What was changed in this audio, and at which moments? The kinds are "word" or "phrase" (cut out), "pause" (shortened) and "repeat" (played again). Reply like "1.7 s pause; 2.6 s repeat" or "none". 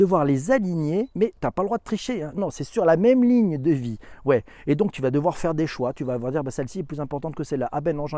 1.1 s word; 2.4 s word